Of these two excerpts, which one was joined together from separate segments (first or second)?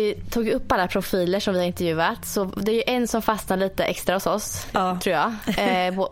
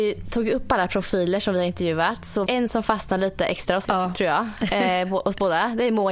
second